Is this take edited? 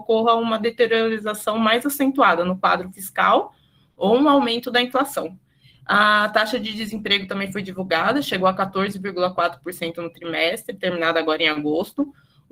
no; 0 cuts

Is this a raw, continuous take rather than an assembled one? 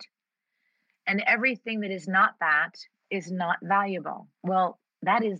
no; 1 cut; at 4.3 s

